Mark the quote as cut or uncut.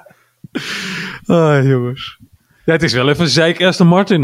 uncut